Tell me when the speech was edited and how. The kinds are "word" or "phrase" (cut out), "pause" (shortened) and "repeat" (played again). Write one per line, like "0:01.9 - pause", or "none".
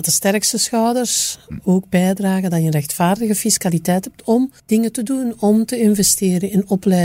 0:04.6 - pause